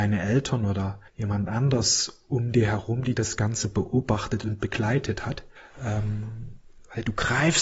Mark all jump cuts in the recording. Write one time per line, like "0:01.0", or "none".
0:01.1
0:05.6